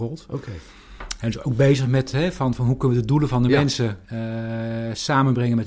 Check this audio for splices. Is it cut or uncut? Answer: cut